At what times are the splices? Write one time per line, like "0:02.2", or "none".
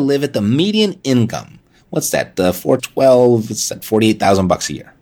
0:02.8